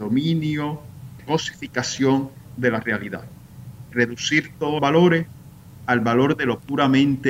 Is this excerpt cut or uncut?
cut